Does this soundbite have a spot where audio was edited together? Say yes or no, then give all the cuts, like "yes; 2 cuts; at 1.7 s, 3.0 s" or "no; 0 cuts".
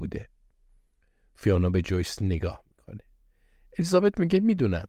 no; 0 cuts